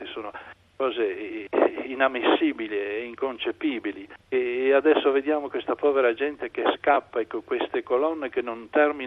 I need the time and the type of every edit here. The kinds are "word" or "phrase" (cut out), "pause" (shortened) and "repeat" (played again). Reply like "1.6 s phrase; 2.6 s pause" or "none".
7.4 s word